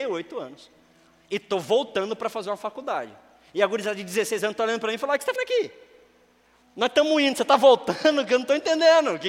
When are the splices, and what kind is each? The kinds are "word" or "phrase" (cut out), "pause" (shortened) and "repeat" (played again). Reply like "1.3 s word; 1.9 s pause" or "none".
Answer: 5.4 s word